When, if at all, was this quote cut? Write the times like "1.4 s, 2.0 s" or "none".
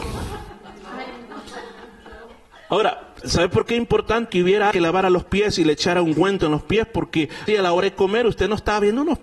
3.2 s, 4.3 s, 4.7 s, 7.5 s